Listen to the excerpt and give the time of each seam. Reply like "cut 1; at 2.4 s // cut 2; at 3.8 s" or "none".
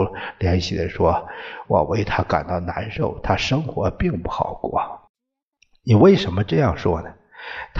cut 1; at 5.1 s

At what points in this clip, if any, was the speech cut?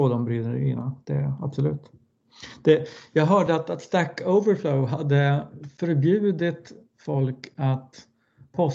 none

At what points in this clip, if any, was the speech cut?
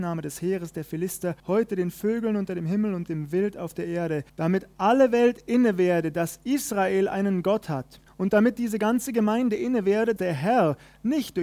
cut 1; at 1.4 s // cut 2; at 4.3 s // cut 3; at 8.1 s // cut 4; at 10.2 s

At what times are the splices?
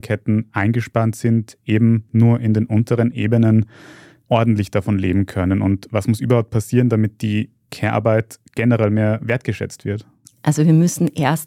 none

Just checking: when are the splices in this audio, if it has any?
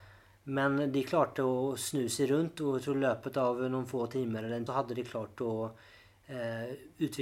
cut 1; at 4.7 s

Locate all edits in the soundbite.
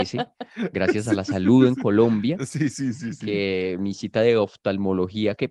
none

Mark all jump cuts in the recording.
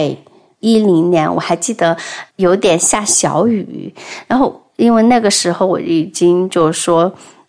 cut 1; at 2.3 s

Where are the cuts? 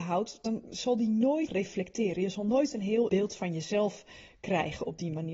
cut 1; at 1.5 s // cut 2; at 3.1 s

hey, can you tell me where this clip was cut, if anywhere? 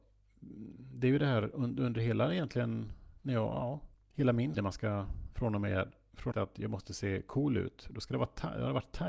cut 1; at 3.9 s // cut 2; at 4.5 s // cut 3; at 6.3 s

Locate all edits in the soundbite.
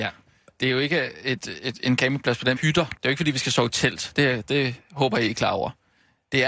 cut 1; at 2.6 s // cut 2; at 3.0 s

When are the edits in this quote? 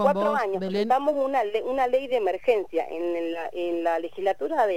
none

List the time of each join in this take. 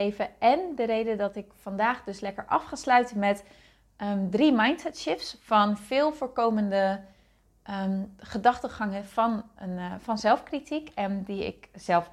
none

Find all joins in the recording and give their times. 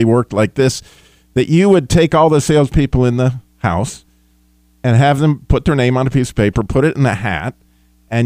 none

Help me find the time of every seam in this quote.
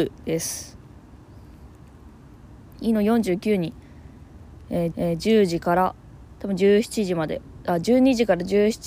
cut 1; at 4.9 s

